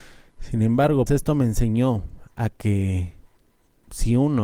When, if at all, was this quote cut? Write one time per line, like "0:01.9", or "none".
0:01.1